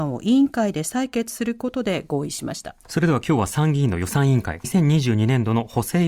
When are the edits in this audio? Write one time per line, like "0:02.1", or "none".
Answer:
0:02.8
0:04.6